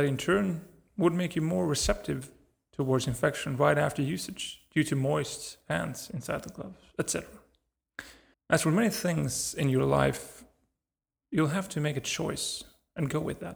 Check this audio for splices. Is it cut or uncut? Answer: cut